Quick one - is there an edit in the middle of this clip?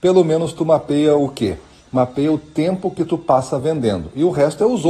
no; 0 cuts

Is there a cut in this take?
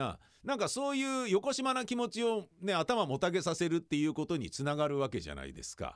yes; 1 cut; at 2.5 s

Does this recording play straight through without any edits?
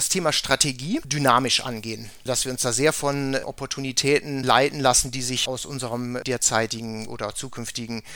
yes; 0 cuts

